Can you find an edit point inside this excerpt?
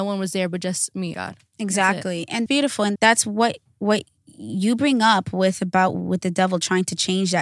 yes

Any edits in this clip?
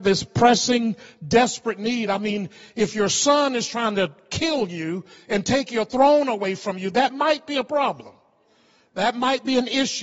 no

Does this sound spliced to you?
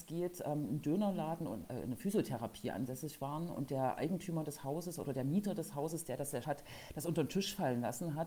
yes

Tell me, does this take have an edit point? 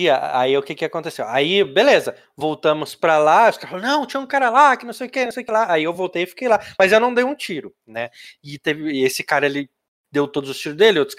no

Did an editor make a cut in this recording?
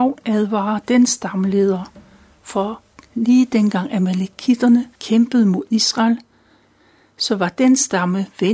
yes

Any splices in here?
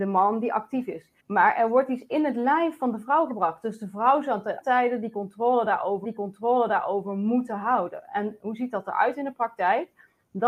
yes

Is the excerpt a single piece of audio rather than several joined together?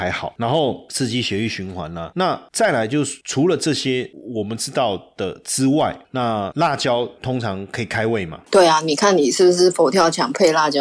no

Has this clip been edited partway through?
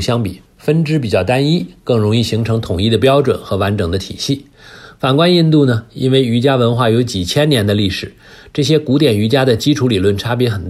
no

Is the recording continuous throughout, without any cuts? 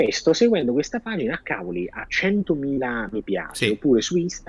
yes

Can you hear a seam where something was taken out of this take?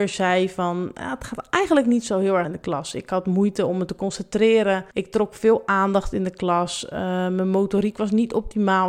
yes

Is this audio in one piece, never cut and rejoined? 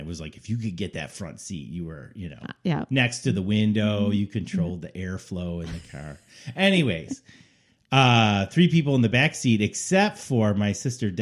yes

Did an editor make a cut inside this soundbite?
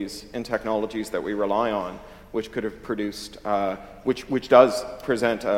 no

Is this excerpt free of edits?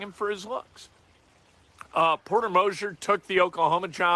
yes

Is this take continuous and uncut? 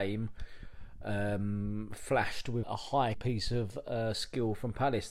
no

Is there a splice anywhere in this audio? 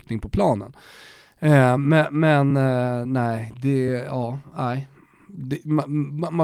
no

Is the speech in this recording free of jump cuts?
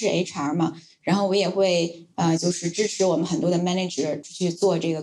yes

